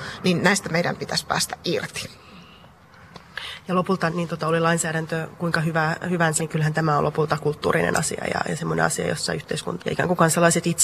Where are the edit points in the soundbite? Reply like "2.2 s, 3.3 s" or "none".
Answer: 4.1 s, 6.4 s, 9.8 s